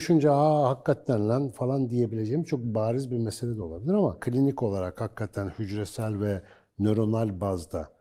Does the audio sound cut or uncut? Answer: uncut